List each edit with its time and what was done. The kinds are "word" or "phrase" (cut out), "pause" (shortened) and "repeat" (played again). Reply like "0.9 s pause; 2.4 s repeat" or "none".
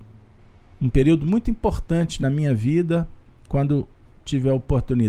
none